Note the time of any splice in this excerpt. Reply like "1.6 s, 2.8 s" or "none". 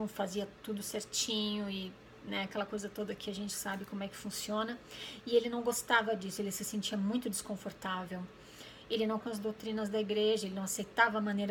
9.2 s